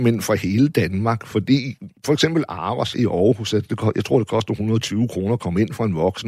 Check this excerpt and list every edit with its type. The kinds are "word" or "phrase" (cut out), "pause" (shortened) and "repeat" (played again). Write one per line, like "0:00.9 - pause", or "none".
0:02.0 - pause
0:02.9 - word